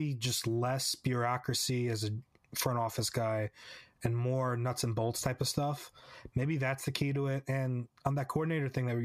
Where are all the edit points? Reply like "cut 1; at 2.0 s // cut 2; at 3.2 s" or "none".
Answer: none